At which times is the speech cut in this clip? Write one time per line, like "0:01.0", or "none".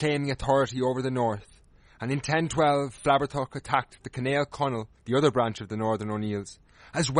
0:05.0